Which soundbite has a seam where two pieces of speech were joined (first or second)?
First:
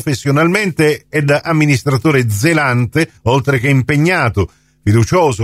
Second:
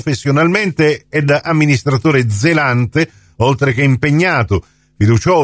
first